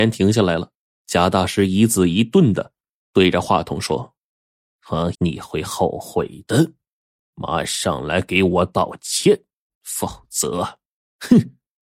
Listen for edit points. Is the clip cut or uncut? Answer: cut